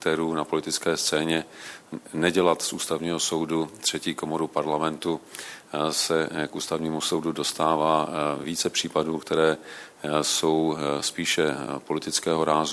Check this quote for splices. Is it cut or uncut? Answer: uncut